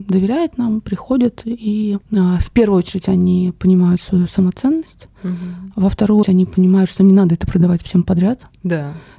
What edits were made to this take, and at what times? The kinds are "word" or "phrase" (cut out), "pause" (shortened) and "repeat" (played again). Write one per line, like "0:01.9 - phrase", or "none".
0:02.0 - pause
0:06.2 - word